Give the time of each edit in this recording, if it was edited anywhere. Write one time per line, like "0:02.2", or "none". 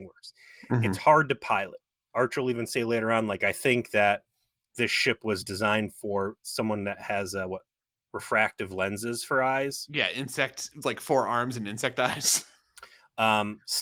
none